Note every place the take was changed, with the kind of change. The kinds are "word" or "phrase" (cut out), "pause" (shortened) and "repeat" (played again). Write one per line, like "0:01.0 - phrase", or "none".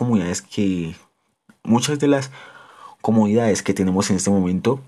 none